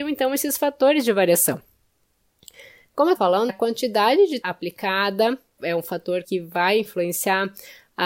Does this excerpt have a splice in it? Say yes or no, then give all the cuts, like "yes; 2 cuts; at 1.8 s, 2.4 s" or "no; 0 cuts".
yes; 5 cuts; at 3.1 s, 3.5 s, 4.4 s, 5.6 s, 6.2 s